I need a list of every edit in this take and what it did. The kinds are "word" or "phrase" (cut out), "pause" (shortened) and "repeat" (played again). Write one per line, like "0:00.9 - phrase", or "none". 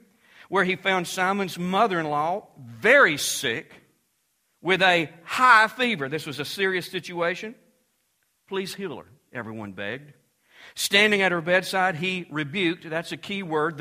none